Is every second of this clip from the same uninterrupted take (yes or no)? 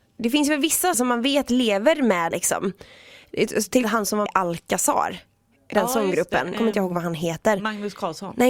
no